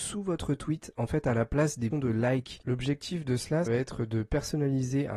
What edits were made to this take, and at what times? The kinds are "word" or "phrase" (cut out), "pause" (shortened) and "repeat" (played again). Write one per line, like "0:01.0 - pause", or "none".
0:01.9 - word
0:03.7 - word